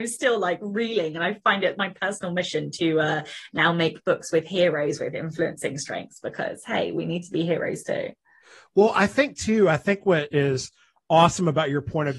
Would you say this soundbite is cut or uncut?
uncut